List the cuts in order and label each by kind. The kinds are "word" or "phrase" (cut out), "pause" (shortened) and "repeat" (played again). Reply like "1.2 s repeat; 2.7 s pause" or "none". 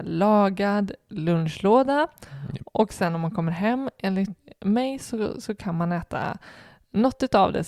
none